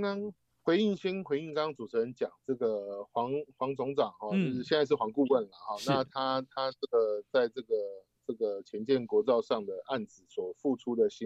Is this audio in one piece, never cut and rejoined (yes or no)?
yes